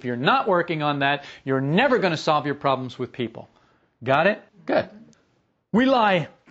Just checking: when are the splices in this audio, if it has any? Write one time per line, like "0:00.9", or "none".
0:04.5